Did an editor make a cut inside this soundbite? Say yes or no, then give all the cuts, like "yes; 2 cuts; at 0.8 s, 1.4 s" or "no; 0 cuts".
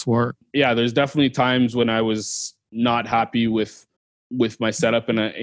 yes; 1 cut; at 4.0 s